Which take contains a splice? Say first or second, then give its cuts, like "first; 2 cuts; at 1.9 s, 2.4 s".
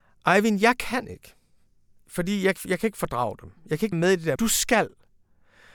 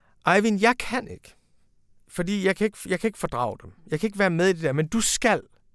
first; 3 cuts; at 2.6 s, 3.9 s, 4.4 s